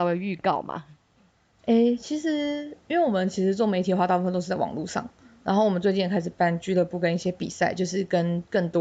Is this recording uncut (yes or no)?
yes